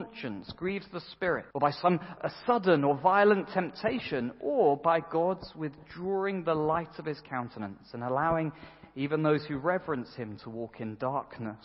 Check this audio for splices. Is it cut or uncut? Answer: cut